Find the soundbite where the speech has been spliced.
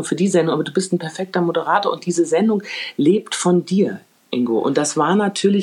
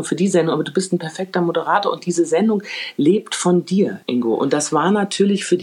second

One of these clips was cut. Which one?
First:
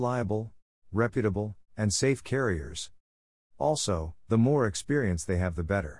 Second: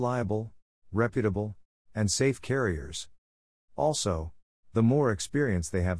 first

